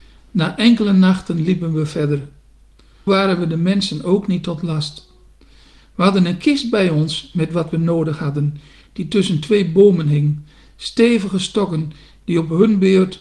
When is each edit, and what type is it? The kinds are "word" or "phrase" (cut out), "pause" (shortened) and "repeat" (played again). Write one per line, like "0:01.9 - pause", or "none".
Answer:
0:03.1 - word